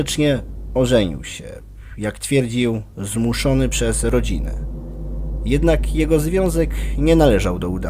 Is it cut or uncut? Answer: uncut